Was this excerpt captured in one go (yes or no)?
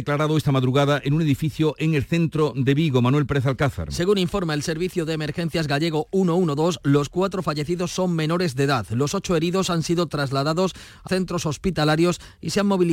no